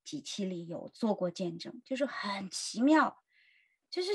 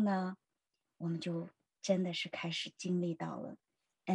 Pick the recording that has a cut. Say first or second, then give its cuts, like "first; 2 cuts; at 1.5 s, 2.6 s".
second; 1 cut; at 1.7 s